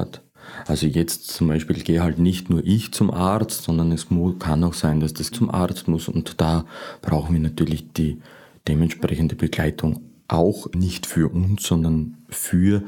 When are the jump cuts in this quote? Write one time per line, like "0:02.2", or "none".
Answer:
0:05.3
0:10.7